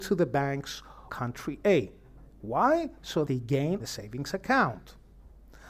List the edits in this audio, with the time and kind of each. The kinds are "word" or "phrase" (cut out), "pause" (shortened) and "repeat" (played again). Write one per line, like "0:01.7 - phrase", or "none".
0:01.1 - word
0:03.3 - word
0:03.8 - word